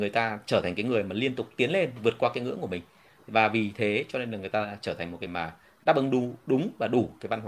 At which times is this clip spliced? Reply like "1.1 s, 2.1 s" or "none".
5.3 s